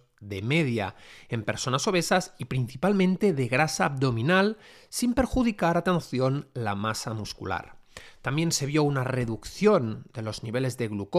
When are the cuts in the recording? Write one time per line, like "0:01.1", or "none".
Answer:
none